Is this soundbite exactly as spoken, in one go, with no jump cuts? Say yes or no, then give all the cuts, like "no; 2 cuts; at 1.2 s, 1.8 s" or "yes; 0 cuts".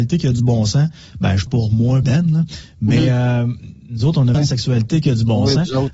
no; 3 cuts; at 1.5 s, 2.0 s, 4.3 s